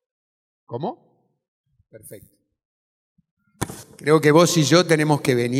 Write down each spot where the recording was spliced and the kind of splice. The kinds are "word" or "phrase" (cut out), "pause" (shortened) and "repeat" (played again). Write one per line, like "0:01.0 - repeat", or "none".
0:01.6 - pause

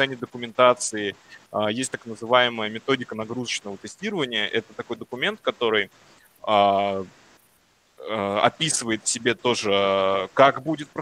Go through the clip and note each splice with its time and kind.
none

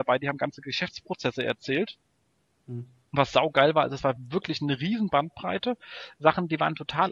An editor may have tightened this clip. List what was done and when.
none

